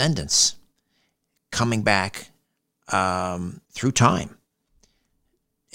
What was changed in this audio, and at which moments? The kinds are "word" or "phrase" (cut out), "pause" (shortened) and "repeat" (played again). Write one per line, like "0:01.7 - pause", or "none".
0:03.6 - pause